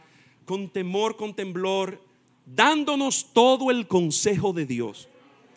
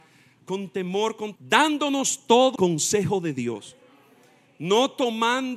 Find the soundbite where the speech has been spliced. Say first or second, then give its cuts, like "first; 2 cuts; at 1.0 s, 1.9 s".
second; 2 cuts; at 1.4 s, 2.6 s